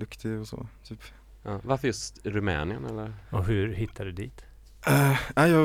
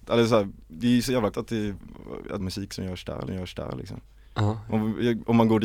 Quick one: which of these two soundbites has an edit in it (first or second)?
second